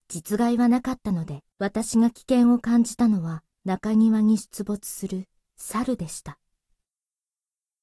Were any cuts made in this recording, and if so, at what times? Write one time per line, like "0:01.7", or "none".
0:01.5
0:03.5
0:05.5